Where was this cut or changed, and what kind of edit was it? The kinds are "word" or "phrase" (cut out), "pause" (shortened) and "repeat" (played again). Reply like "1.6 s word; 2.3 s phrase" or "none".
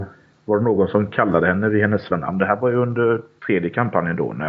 2.1 s word; 3.4 s pause